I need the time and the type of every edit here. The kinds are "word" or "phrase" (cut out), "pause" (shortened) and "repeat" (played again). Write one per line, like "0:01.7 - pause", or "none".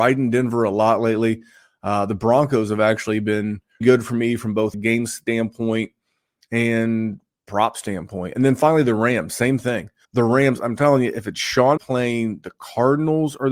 0:03.8 - word
0:04.7 - phrase
0:10.0 - pause
0:11.8 - word